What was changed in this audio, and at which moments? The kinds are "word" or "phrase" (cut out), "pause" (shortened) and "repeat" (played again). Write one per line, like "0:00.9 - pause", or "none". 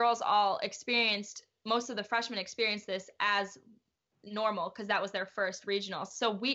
none